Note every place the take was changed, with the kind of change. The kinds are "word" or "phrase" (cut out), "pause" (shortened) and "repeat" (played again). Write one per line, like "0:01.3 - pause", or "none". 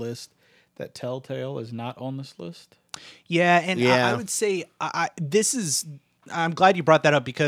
0:06.2 - pause